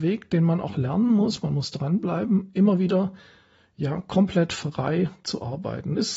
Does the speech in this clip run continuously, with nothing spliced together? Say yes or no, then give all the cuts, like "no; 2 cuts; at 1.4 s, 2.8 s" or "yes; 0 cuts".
yes; 0 cuts